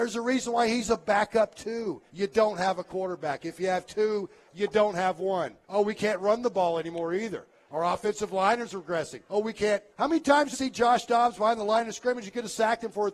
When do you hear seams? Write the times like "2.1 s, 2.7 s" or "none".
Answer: 2.1 s, 5.6 s, 9.3 s, 9.9 s, 10.5 s